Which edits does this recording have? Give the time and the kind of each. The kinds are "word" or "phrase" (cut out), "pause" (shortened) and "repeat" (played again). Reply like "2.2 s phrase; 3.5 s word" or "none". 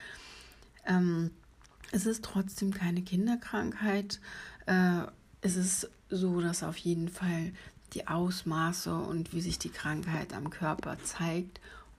none